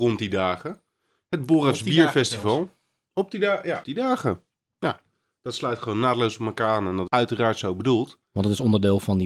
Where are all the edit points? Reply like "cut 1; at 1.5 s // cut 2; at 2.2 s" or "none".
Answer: cut 1; at 3.8 s // cut 2; at 7.1 s